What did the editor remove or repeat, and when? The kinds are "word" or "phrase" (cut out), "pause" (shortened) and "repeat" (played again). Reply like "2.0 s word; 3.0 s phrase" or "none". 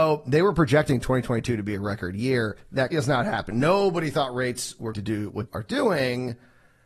2.9 s word; 4.9 s word; 5.5 s word